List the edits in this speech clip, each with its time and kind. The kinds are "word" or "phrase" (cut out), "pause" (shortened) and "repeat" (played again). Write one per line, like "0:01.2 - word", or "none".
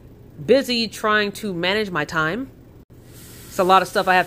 none